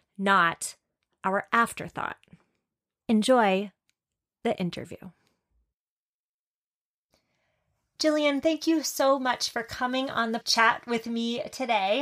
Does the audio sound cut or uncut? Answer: cut